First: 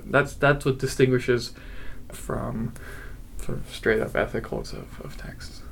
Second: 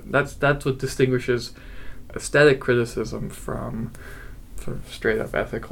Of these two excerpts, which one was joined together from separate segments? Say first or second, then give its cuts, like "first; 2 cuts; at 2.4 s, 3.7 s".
first; 2 cuts; at 2.1 s, 4.6 s